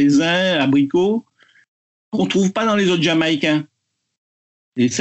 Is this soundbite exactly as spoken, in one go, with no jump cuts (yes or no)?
yes